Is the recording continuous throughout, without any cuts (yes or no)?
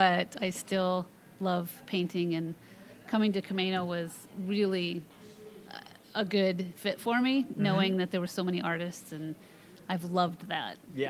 yes